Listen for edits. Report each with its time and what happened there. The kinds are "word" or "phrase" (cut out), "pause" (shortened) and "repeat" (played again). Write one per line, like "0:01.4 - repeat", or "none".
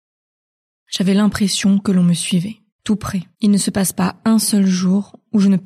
0:02.7 - pause
0:03.3 - pause